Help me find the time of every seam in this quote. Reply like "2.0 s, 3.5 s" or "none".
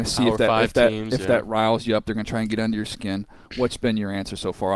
none

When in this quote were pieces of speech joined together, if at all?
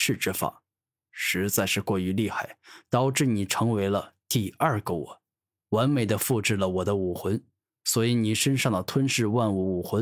none

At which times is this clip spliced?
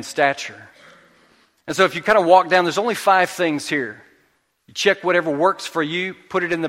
none

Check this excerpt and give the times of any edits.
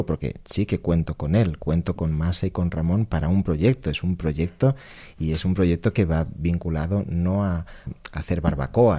7.9 s

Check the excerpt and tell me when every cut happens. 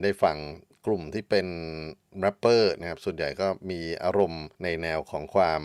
4.5 s

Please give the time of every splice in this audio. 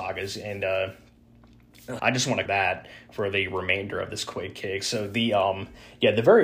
2.0 s, 2.5 s

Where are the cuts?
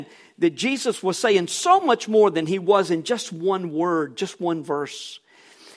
none

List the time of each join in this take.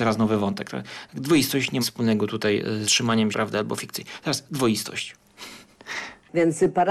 1.8 s, 2.8 s, 3.3 s

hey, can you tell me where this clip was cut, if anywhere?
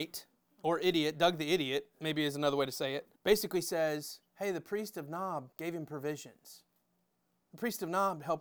3.2 s, 4.3 s, 5.5 s

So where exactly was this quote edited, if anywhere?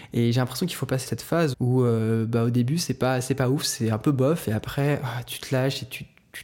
1.1 s, 1.5 s

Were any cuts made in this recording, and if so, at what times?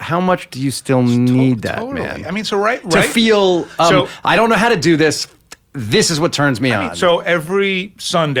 5.6 s

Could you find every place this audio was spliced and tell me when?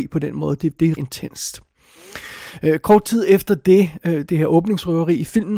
1.0 s, 4.3 s

